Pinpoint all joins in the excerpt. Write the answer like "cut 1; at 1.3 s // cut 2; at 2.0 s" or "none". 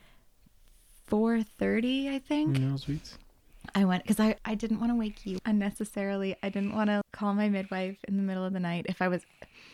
cut 1; at 4.4 s // cut 2; at 5.4 s // cut 3; at 7.0 s